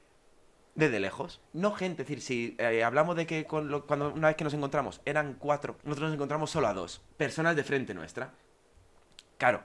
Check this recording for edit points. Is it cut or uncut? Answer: cut